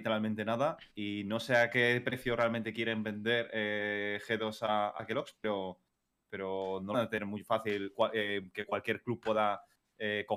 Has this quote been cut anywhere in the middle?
yes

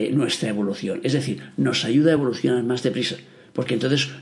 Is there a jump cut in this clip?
no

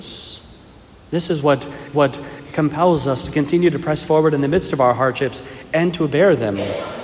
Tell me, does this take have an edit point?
yes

